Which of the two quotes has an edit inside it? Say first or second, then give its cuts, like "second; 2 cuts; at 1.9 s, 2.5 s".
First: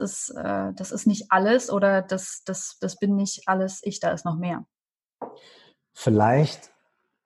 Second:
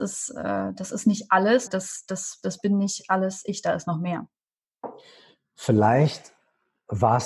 second; 1 cut; at 1.7 s